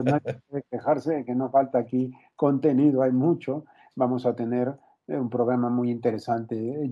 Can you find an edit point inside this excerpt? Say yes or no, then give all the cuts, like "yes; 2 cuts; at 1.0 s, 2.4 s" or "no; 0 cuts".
no; 0 cuts